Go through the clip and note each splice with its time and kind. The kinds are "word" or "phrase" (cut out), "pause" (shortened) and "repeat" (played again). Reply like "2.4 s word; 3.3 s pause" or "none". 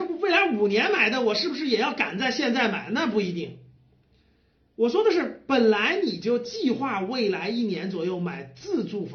none